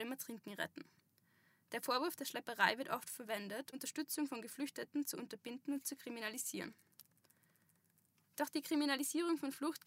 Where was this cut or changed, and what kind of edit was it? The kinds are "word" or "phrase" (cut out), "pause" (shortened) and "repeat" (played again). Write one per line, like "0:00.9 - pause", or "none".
0:03.7 - word